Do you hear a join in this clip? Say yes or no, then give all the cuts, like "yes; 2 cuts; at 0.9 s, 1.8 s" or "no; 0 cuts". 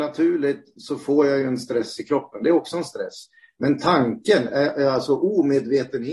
no; 0 cuts